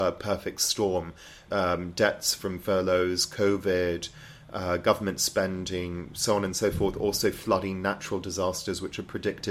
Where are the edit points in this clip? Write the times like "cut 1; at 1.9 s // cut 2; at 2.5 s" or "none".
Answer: cut 1; at 1.5 s